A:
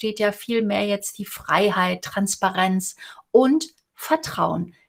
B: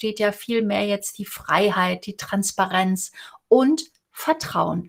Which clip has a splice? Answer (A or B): A